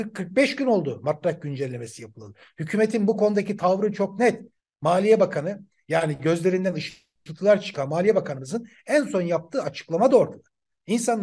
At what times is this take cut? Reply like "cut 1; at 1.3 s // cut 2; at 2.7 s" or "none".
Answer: none